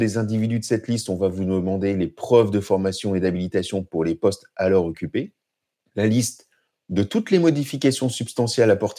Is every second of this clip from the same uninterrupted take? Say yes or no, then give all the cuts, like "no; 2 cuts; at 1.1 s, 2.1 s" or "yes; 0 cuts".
yes; 0 cuts